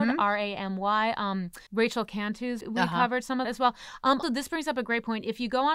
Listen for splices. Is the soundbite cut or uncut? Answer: cut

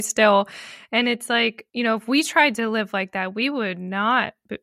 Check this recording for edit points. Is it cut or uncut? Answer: cut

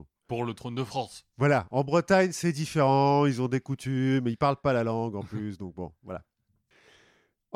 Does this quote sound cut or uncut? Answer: uncut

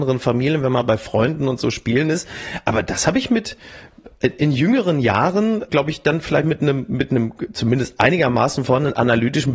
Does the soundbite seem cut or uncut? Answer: cut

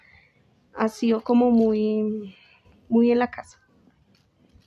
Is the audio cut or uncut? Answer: uncut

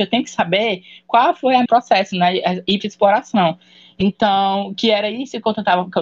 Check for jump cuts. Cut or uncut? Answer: cut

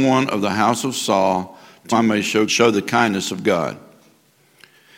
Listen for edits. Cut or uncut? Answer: cut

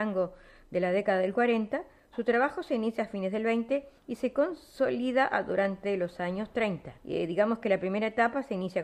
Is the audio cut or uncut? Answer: cut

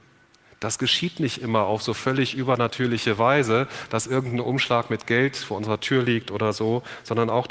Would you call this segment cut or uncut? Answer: uncut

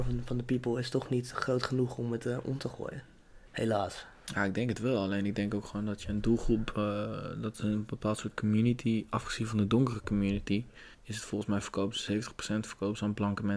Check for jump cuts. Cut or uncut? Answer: cut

